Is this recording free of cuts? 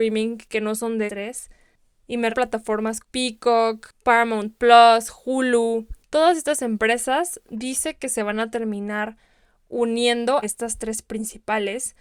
no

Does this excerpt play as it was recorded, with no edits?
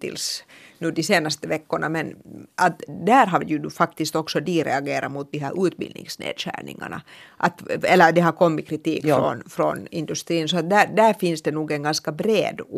yes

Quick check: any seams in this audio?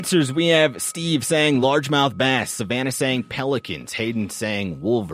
no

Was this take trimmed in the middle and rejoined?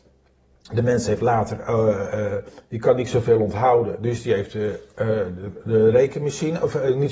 no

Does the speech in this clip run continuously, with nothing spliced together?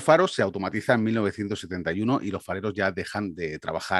yes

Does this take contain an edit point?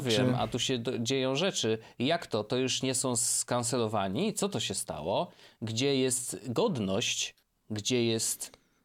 yes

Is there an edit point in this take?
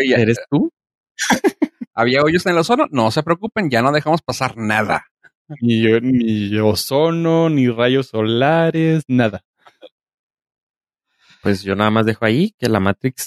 no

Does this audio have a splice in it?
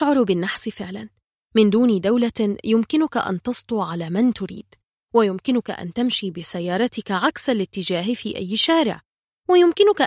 no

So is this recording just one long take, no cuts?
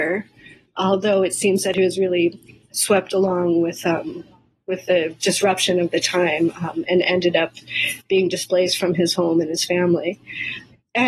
yes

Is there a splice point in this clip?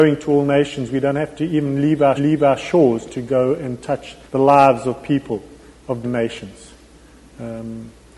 yes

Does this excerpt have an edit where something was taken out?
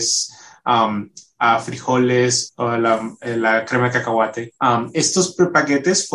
yes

